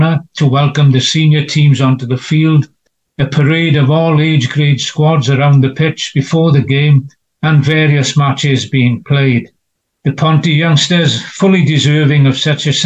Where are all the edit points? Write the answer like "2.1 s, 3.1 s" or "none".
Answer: none